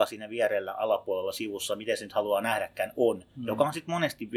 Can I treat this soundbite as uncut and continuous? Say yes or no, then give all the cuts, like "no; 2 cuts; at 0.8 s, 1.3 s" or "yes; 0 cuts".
yes; 0 cuts